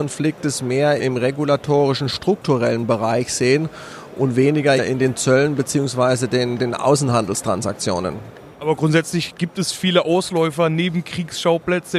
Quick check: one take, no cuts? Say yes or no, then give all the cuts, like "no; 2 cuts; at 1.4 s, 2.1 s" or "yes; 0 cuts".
no; 3 cuts; at 1.0 s, 4.8 s, 6.6 s